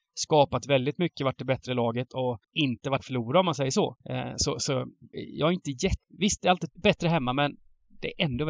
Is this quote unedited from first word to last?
no; 6 cuts; at 2.4 s, 3.0 s, 4.0 s, 5.1 s, 6.0 s, 6.8 s

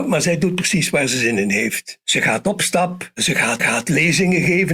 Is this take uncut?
no; 1 cut; at 3.6 s

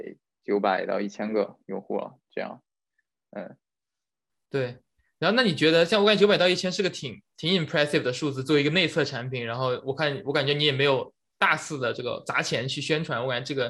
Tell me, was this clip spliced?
no; 0 cuts

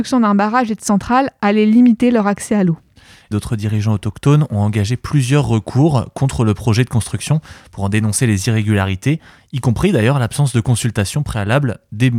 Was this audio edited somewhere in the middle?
yes; 1 cut; at 3.3 s

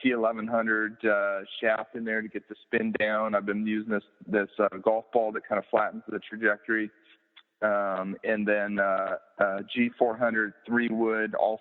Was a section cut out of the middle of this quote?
no; 0 cuts

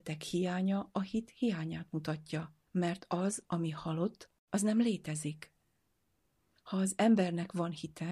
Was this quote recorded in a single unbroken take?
no; 1 cut; at 2.7 s

